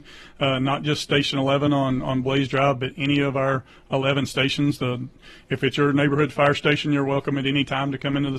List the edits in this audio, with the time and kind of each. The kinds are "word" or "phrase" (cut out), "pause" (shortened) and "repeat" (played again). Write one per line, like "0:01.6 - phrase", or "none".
none